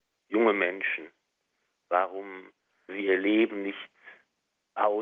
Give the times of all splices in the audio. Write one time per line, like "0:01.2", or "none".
0:02.9